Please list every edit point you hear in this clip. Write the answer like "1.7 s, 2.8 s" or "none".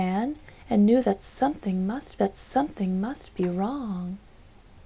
2.2 s